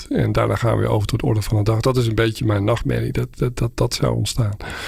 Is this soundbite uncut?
yes; 0 cuts

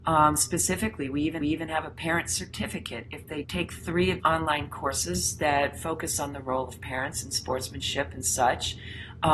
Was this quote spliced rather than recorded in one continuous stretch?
yes; 3 cuts; at 1.4 s, 3.4 s, 4.2 s

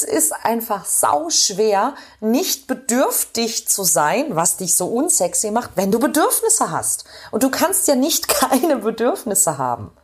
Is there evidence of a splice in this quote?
no; 0 cuts

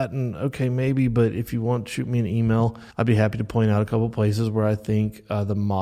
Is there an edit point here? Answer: yes; 1 cut; at 2.9 s

